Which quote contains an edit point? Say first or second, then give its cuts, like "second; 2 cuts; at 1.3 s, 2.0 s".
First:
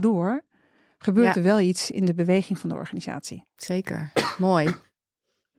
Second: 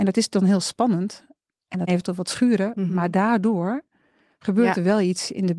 second; 1 cut; at 1.9 s